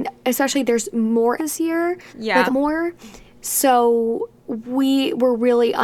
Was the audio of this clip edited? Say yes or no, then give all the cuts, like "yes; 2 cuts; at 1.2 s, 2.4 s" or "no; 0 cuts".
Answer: yes; 3 cuts; at 1.4 s, 2.1 s, 2.5 s